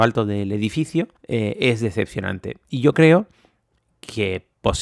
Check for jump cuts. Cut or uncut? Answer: cut